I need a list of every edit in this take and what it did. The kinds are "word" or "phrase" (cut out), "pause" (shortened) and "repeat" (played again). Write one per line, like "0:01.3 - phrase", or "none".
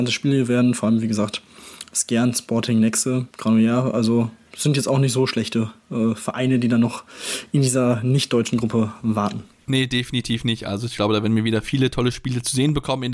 0:03.3 - pause